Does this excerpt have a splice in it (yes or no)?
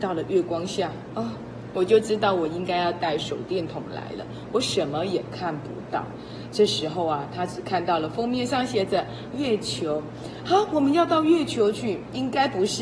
yes